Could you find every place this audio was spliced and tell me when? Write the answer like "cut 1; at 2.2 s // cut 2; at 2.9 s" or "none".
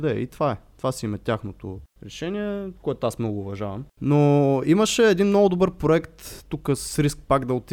none